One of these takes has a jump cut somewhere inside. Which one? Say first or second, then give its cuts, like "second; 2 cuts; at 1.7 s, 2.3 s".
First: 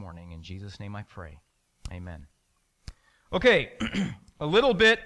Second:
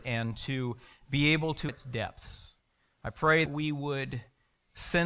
second; 2 cuts; at 1.7 s, 3.5 s